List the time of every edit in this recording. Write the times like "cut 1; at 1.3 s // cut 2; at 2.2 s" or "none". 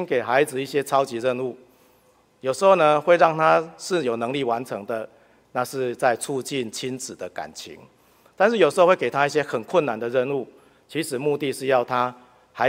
none